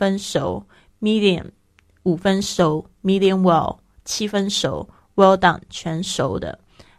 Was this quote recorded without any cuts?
yes; 0 cuts

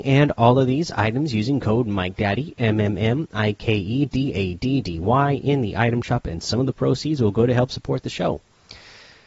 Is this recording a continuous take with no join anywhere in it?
yes; 0 cuts

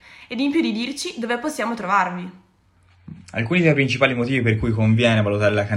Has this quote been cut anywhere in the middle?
no; 0 cuts

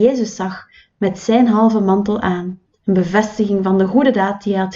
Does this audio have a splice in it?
yes; 1 cut; at 2.7 s

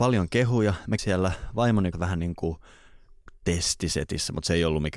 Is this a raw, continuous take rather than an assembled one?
no; 2 cuts; at 1.0 s, 1.9 s

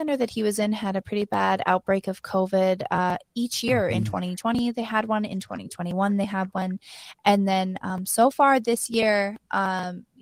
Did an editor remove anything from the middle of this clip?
no; 0 cuts

